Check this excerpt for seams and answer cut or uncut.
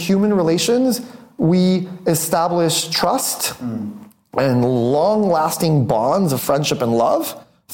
uncut